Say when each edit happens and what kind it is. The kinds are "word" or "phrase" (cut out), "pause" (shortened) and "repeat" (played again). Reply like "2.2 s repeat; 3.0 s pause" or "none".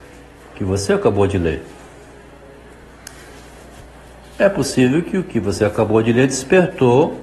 none